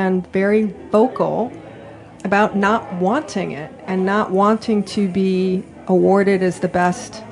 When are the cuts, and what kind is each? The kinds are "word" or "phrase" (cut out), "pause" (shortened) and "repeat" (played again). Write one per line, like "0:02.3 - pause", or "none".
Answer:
none